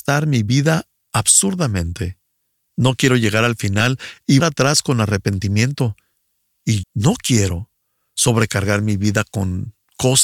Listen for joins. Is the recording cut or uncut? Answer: cut